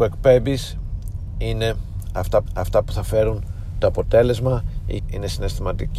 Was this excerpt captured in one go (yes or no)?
no